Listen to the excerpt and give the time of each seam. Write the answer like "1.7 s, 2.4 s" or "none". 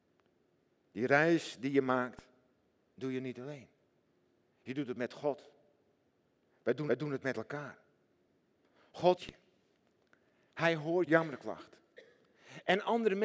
6.9 s, 9.2 s, 11.1 s